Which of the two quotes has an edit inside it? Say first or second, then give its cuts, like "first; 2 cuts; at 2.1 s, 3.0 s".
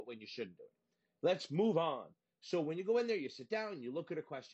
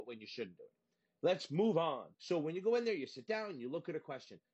second; 1 cut; at 2.1 s